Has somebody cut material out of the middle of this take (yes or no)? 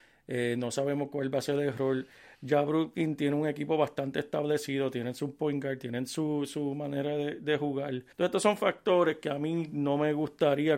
yes